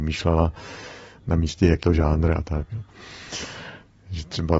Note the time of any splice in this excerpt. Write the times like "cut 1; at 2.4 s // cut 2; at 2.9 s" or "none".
cut 1; at 1.8 s